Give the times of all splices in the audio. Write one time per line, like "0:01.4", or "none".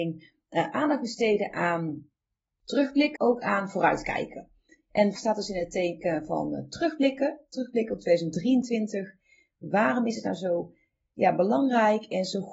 0:03.2
0:05.2